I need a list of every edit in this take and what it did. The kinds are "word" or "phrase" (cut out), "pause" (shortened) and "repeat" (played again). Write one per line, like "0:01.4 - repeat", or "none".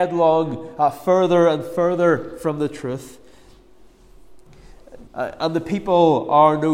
0:05.1 - pause